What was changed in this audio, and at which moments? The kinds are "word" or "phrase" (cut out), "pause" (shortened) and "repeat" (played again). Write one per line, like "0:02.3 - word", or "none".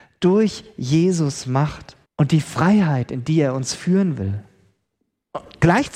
0:02.0 - pause